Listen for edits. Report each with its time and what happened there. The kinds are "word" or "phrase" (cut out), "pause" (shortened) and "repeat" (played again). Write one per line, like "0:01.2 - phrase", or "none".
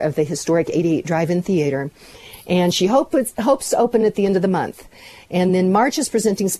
none